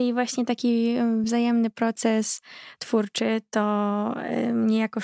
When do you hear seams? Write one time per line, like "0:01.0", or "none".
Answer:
none